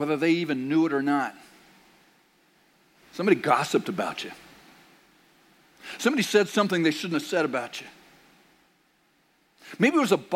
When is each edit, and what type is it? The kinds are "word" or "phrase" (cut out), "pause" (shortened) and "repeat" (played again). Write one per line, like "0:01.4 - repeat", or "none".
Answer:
none